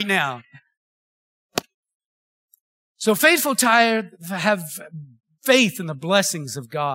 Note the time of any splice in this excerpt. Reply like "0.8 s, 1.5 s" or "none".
none